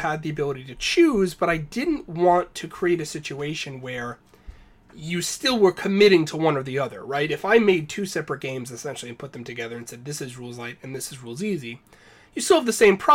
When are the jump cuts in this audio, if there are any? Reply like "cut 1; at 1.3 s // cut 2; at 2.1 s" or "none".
none